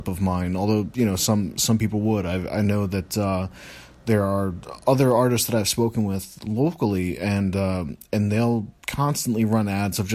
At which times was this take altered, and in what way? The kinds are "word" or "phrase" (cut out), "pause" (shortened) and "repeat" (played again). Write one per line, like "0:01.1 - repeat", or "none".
none